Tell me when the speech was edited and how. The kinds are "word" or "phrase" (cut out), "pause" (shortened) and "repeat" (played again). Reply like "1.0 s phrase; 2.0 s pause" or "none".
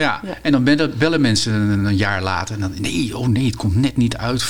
none